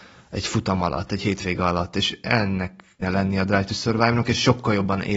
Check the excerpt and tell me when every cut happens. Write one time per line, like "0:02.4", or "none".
0:03.0